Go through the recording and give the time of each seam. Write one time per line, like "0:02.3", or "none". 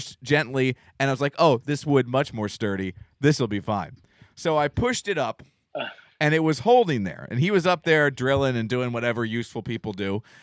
none